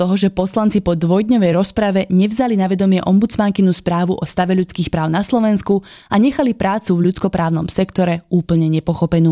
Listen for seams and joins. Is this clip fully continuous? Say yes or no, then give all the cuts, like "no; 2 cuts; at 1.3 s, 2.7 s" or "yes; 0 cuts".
yes; 0 cuts